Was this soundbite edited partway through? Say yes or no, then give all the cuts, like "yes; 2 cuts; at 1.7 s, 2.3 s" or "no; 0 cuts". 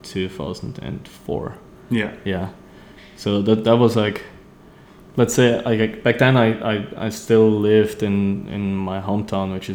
no; 0 cuts